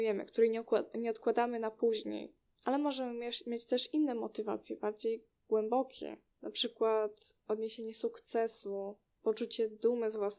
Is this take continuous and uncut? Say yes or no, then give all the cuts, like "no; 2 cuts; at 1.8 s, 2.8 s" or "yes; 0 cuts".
yes; 0 cuts